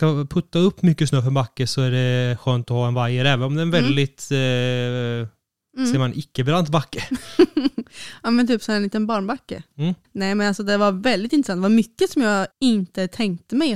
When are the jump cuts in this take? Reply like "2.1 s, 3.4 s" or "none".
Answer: 10.0 s, 12.5 s